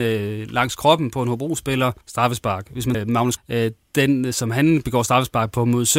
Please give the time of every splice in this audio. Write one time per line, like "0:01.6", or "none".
0:02.0
0:02.9
0:03.4